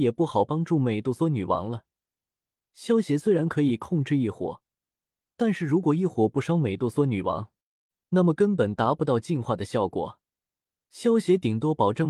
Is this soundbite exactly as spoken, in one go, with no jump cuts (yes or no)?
yes